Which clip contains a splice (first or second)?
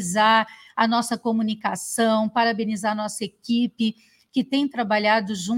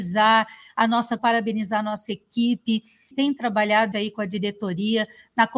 second